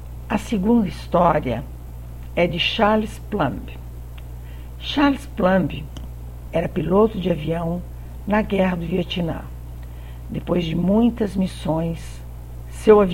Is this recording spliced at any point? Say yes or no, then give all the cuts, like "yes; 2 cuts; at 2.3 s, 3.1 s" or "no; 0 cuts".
no; 0 cuts